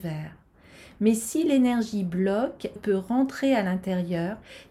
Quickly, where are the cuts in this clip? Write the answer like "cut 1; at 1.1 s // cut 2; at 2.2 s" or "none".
cut 1; at 2.8 s